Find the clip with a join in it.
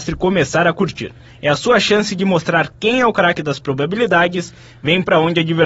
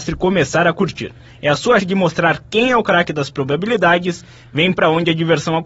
second; 1 cut; at 1.8 s

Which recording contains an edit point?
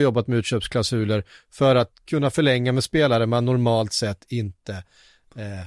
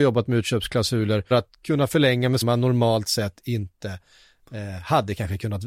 second; 2 cuts; at 1.3 s, 2.4 s

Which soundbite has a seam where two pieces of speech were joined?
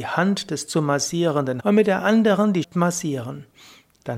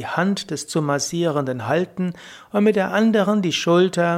first; 2 cuts; at 1.6 s, 2.6 s

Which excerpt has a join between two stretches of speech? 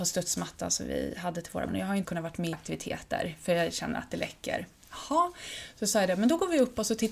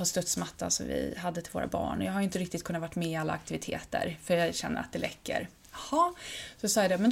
first; 3 cuts; at 1.7 s, 2.0 s, 2.5 s

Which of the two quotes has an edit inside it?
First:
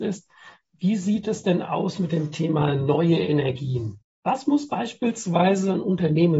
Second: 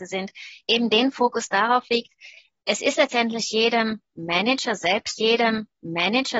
second; 1 cut; at 5.2 s

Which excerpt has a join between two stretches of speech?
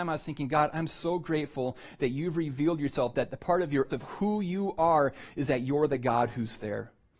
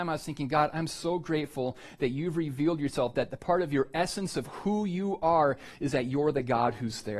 first; 1 cut; at 3.9 s

